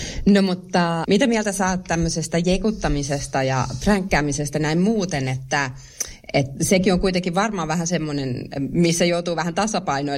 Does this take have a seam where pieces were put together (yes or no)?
yes